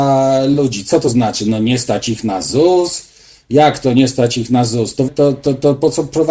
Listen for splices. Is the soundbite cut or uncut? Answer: cut